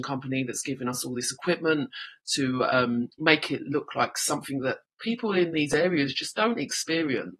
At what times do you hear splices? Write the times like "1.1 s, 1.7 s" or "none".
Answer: none